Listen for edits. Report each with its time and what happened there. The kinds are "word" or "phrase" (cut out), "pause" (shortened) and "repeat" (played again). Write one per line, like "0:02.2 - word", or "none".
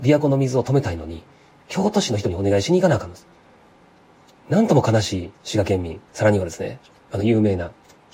0:05.3 - pause
0:06.1 - pause